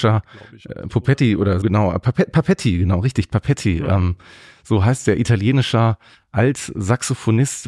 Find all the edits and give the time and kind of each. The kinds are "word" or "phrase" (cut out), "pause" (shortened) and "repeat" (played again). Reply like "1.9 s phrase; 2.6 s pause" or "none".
1.6 s word